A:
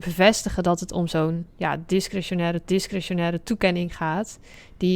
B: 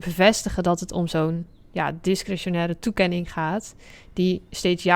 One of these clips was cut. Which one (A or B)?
A